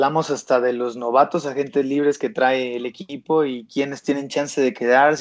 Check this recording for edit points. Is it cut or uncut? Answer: uncut